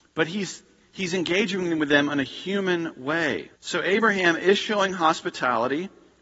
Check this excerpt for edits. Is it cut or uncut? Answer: cut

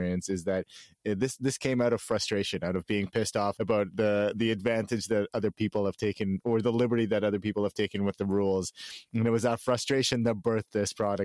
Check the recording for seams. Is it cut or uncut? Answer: cut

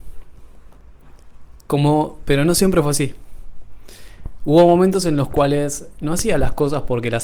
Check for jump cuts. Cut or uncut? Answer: uncut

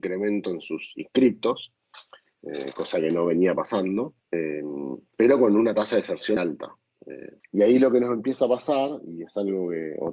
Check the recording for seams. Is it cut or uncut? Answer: cut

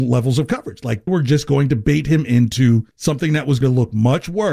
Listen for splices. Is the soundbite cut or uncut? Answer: cut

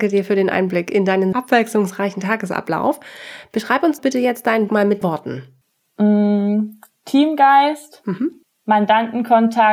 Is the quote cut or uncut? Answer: cut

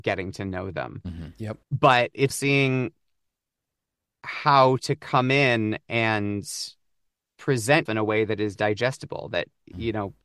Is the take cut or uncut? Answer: cut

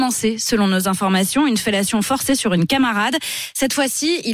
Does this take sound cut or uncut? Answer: uncut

